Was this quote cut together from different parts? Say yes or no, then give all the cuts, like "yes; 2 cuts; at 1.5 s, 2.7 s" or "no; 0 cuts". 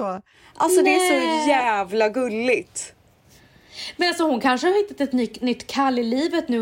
no; 0 cuts